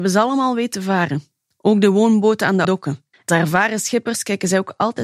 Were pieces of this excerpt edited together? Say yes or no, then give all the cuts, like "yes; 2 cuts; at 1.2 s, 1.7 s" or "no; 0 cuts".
yes; 2 cuts; at 2.6 s, 3.3 s